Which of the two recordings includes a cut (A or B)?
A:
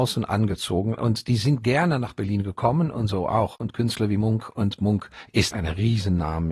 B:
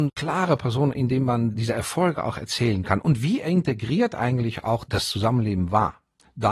A